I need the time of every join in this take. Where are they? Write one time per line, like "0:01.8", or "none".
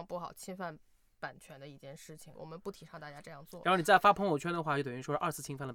0:02.3